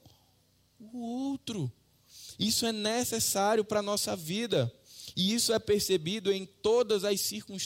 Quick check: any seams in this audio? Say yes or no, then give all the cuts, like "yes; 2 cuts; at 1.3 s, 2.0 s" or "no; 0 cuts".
no; 0 cuts